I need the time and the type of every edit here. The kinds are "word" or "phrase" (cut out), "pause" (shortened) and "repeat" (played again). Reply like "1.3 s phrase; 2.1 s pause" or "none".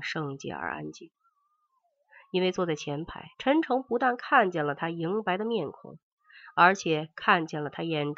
3.3 s pause